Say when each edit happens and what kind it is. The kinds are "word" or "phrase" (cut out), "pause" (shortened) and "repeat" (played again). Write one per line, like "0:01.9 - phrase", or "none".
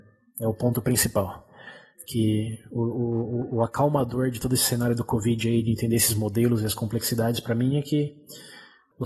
none